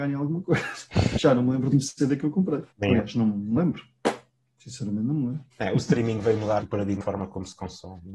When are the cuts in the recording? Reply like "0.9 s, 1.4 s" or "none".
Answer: 1.7 s, 2.7 s, 3.6 s, 5.5 s, 6.6 s, 7.0 s